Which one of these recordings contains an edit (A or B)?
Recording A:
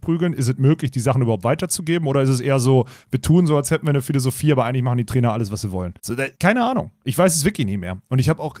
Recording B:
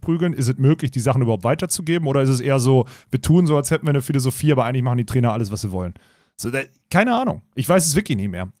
A